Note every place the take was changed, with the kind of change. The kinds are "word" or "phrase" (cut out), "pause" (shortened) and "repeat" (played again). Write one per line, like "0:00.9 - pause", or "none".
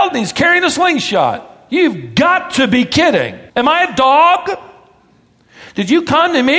0:03.5 - pause

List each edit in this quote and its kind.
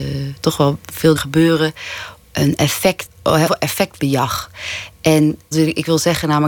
0:01.2 - word
0:02.2 - word
0:03.1 - word
0:03.5 - phrase
0:05.5 - word

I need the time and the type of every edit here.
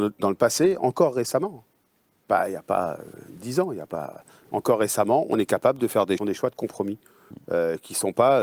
0:06.2 - phrase

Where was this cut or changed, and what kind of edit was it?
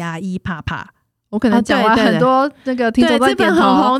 none

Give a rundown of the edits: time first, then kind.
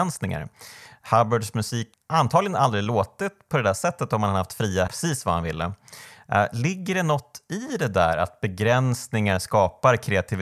0:01.9 - word
0:04.9 - phrase

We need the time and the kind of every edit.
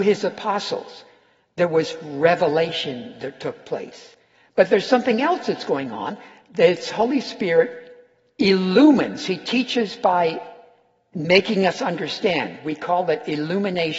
none

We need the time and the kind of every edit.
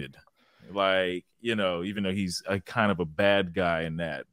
none

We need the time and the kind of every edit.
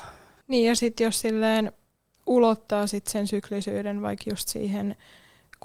none

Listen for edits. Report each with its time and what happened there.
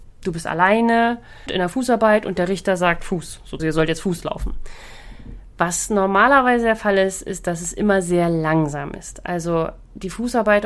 0:01.5 - phrase
0:03.6 - word

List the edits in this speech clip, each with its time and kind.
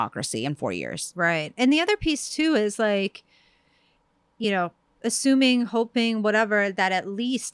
none

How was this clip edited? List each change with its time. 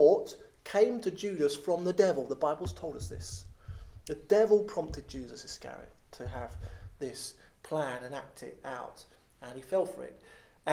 none

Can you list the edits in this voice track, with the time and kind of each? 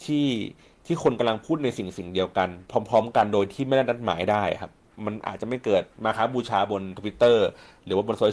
0:02.6 - pause

